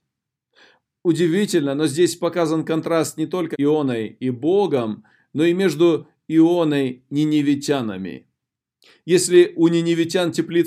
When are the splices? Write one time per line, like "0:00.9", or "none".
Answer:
0:03.5
0:07.1